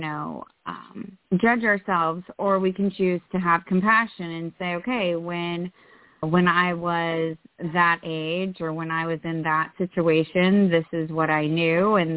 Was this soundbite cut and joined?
yes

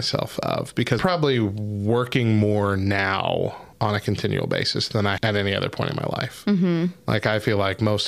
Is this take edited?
yes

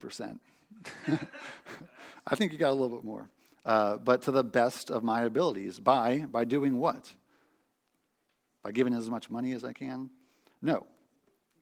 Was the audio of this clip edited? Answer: no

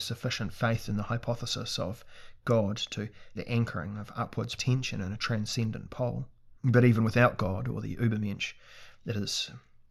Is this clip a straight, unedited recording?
no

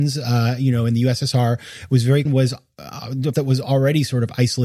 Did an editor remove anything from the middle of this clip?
yes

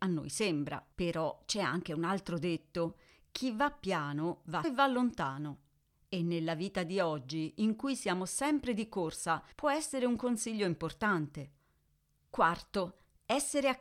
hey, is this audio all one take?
no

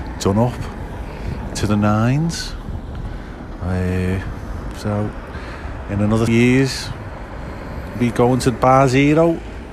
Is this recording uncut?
no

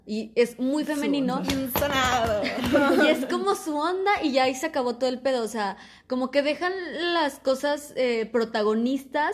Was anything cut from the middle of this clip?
no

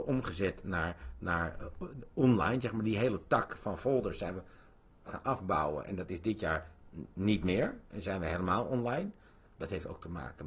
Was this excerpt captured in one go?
no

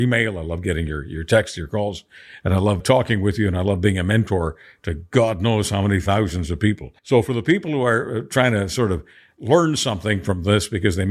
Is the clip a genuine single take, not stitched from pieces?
no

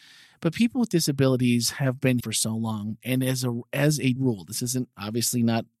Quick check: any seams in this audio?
yes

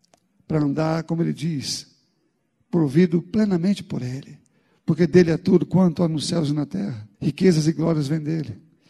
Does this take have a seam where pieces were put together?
yes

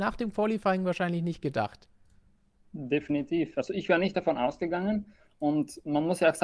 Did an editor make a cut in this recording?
no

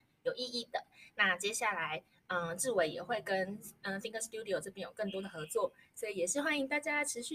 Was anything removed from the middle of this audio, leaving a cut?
no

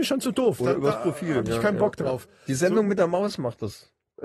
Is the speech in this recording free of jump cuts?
yes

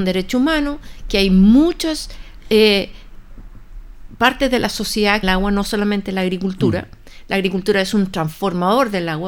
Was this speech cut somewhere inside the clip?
yes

